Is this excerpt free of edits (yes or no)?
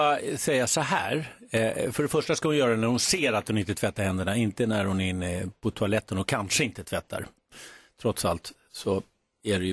yes